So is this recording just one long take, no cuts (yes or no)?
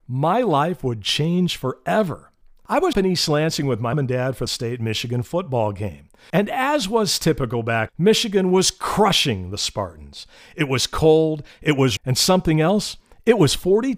no